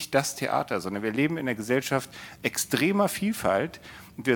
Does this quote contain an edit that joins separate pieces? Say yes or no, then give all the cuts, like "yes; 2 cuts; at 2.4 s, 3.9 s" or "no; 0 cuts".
no; 0 cuts